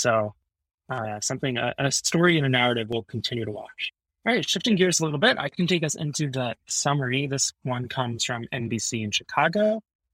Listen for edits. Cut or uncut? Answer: uncut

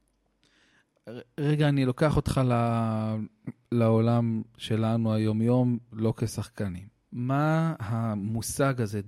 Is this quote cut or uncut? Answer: cut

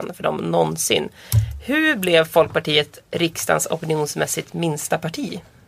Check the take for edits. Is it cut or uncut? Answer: uncut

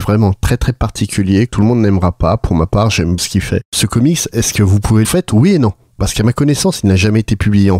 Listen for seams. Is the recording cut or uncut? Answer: cut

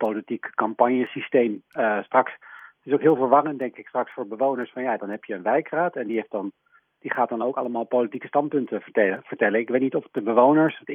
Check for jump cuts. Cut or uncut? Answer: uncut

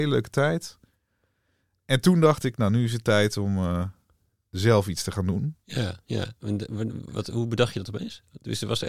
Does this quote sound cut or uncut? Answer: uncut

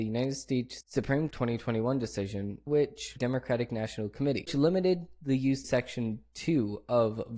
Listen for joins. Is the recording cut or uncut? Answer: cut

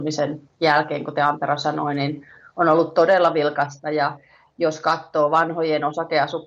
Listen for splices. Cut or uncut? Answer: uncut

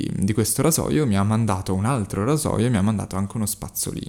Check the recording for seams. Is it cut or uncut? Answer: uncut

